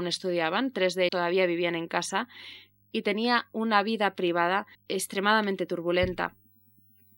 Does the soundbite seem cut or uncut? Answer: cut